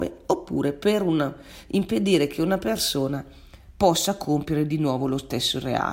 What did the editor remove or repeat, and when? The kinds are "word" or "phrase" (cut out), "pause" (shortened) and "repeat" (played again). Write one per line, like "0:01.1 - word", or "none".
none